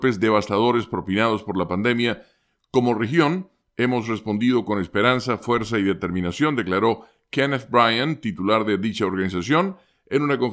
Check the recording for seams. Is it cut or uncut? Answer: uncut